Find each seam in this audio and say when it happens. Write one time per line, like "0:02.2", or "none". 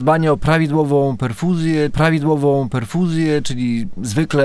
0:01.9